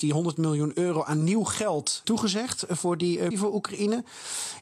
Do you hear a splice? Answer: yes; 2 cuts; at 2.0 s, 3.3 s

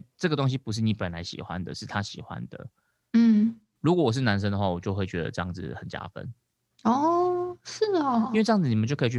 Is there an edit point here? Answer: no; 0 cuts

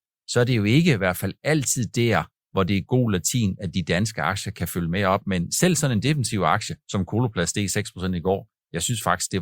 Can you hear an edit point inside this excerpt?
yes; 1 cut; at 6.8 s

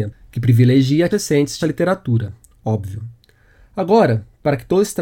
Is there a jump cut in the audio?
yes; 2 cuts; at 1.1 s, 1.6 s

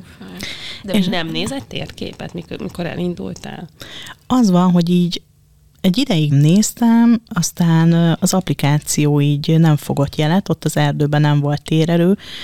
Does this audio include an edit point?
yes; 1 cut; at 6.3 s

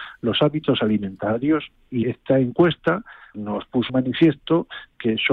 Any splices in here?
yes; 3 cuts; at 2.0 s, 3.3 s, 3.9 s

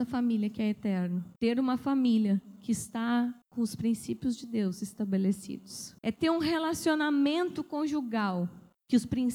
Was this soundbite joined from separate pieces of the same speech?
yes; 3 cuts; at 1.4 s, 3.4 s, 6.0 s

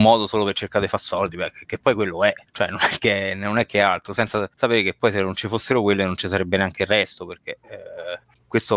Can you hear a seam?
yes; 2 cuts; at 2.5 s, 4.5 s

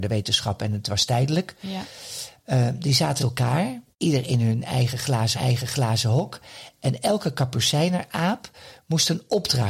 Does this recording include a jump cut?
yes; 3 cuts; at 3.2 s, 3.9 s, 5.3 s

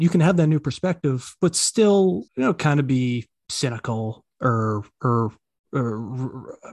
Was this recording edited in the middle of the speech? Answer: yes; 1 cut; at 2.3 s

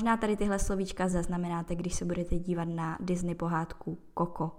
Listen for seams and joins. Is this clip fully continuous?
yes; 0 cuts

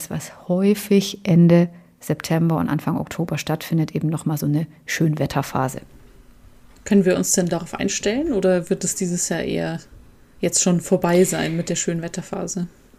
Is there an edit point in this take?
no; 0 cuts

